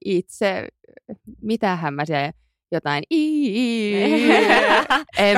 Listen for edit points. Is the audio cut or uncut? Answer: uncut